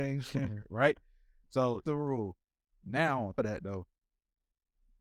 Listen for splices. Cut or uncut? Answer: cut